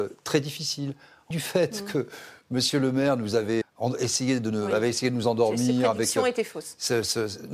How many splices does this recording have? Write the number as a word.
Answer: two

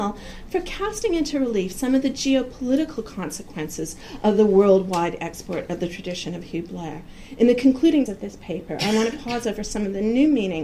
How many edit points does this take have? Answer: one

